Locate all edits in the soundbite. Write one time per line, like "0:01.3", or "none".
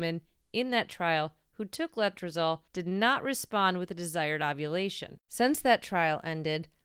0:02.7
0:05.2